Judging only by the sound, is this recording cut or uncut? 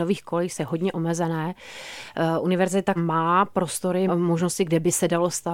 cut